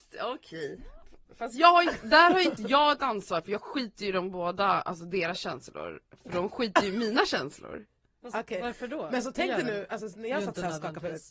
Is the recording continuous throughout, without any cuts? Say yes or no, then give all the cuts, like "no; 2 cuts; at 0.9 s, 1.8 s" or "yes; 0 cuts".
yes; 0 cuts